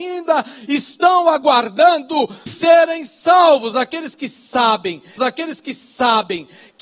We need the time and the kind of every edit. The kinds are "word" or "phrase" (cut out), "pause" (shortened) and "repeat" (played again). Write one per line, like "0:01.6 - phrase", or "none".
0:02.5 - word
0:05.2 - repeat